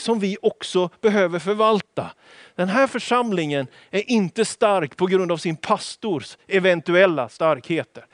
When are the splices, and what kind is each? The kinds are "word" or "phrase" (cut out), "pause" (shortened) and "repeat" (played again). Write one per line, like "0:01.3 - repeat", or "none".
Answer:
none